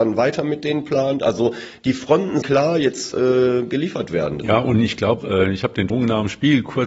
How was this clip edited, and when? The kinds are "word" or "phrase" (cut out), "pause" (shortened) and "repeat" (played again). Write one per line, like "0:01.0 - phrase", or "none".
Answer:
0:02.4 - word
0:03.1 - word
0:05.2 - word
0:05.9 - word